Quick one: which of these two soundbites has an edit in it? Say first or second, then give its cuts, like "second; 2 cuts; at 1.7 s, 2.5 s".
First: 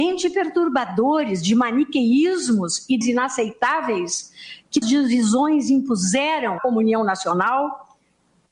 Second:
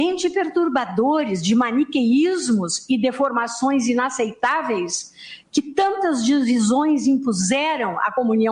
first; 3 cuts; at 3.0 s, 4.8 s, 6.6 s